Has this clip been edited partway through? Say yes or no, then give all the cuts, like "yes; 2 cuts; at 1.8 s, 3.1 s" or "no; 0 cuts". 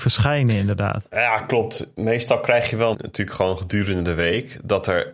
yes; 1 cut; at 2.9 s